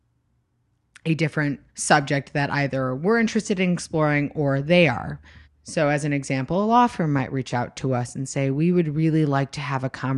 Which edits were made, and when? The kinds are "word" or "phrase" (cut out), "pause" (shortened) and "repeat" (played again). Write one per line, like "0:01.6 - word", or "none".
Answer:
0:01.7 - pause
0:05.4 - pause